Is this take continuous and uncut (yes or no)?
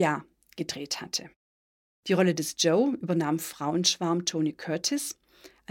yes